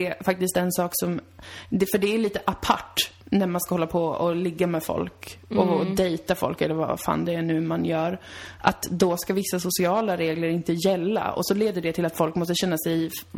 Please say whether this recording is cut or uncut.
cut